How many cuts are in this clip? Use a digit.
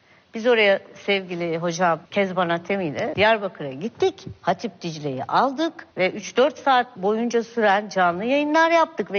4